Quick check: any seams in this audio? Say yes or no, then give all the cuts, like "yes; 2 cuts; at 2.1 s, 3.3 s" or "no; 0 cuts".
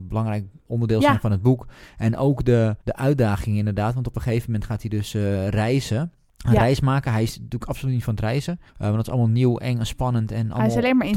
yes; 3 cuts; at 2.8 s, 6.3 s, 8.7 s